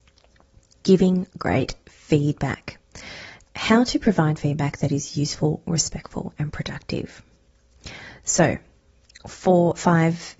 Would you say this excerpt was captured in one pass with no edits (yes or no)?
yes